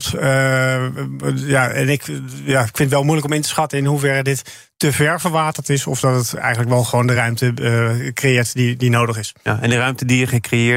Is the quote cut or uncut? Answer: uncut